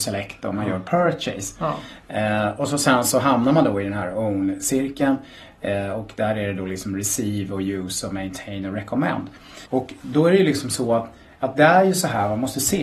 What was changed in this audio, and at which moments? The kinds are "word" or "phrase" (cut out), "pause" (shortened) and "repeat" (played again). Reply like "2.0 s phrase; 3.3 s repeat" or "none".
9.7 s pause